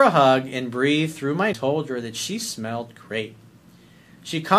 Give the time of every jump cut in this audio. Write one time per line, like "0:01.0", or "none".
0:01.5

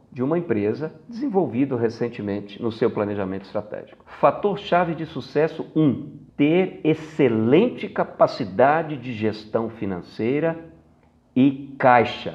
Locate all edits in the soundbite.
none

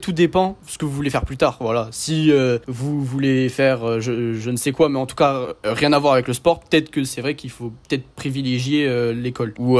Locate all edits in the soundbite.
none

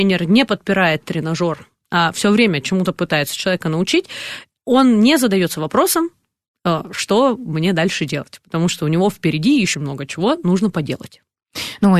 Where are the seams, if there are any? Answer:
0:09.7

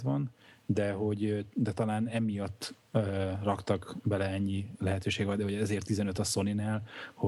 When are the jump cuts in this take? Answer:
none

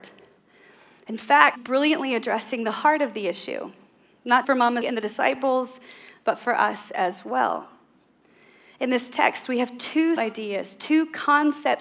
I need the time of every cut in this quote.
0:01.6
0:04.4
0:04.8
0:10.2

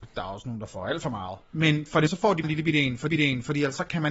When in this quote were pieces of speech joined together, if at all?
0:02.1
0:02.4
0:03.1

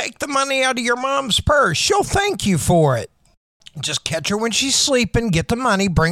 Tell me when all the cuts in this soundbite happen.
none

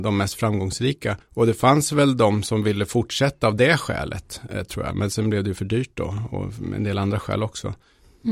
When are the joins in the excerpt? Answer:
0:01.2

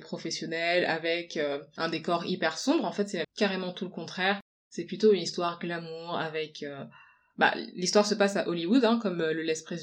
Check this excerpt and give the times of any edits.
0:03.2

